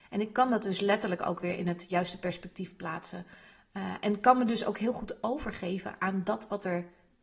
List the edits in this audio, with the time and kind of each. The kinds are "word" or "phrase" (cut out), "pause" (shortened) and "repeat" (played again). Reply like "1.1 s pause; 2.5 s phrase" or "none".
none